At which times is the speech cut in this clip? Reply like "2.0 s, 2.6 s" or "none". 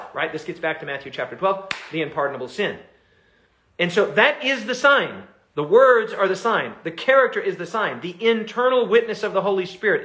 none